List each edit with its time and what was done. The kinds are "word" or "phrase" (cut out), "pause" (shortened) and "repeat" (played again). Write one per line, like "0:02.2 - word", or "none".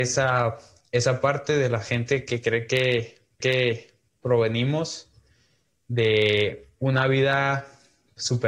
0:03.4 - repeat
0:06.8 - pause